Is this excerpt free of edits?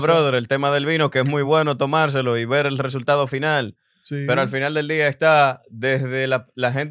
yes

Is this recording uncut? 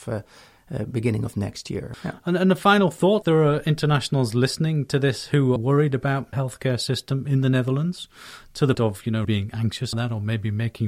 no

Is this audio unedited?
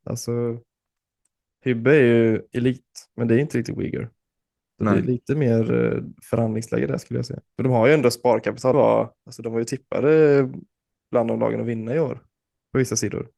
no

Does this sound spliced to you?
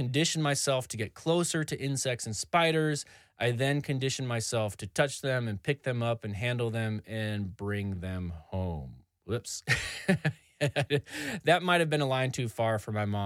no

